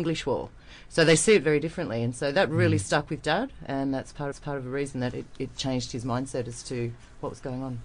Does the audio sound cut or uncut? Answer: cut